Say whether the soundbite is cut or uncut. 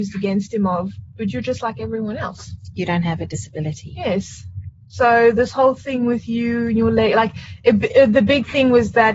uncut